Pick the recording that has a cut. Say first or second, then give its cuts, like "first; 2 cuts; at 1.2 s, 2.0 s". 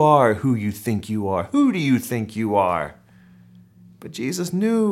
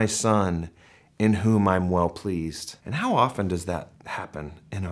second; 2 cuts; at 2.8 s, 3.9 s